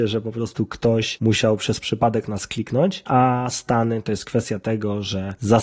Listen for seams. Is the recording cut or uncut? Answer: uncut